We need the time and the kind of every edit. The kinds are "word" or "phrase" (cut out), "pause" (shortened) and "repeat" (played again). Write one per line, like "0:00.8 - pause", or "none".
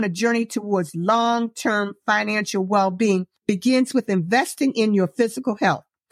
0:03.4 - pause